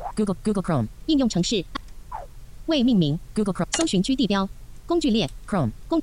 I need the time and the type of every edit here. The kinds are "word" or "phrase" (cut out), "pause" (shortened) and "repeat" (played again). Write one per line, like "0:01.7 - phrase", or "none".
none